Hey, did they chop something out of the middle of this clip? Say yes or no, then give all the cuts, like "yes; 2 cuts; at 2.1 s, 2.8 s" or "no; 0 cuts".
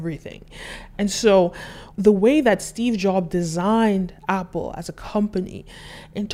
yes; 1 cut; at 1.9 s